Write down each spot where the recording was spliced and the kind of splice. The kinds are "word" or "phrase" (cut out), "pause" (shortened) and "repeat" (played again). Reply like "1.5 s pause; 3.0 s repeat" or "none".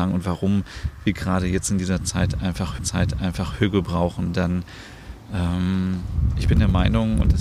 2.8 s repeat